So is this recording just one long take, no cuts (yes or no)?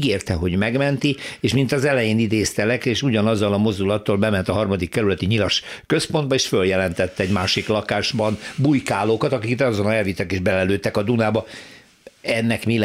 yes